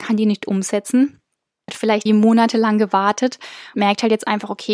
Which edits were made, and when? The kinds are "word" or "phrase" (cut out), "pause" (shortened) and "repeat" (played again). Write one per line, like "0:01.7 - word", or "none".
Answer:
0:01.7 - word
0:02.1 - word
0:03.7 - word